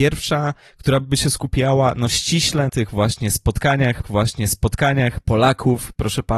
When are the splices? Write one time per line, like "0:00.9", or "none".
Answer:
0:02.7
0:04.0